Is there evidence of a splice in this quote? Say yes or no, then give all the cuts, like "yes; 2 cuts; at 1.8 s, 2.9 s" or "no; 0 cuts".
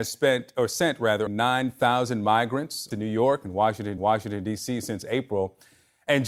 yes; 3 cuts; at 1.3 s, 2.9 s, 4.0 s